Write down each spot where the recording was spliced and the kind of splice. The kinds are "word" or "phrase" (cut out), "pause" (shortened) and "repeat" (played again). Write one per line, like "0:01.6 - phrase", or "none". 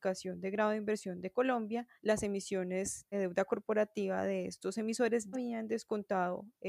0:02.0 - pause
0:03.1 - word
0:05.3 - word